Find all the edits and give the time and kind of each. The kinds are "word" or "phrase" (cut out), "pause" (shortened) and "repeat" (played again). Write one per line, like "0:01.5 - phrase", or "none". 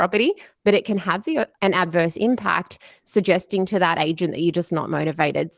0:01.6 - word